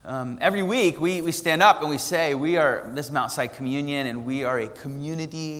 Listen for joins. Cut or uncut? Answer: uncut